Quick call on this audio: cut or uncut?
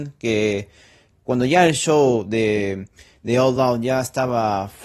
uncut